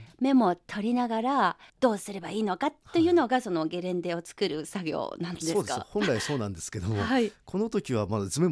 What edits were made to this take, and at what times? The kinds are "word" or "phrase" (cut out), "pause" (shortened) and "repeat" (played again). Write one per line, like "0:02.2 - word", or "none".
0:01.7 - pause